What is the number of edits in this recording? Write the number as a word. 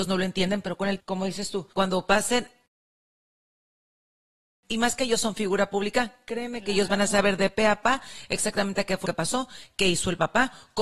three